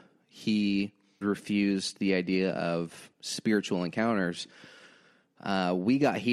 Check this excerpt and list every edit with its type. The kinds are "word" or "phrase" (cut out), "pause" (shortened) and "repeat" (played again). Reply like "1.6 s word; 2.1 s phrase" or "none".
1.2 s word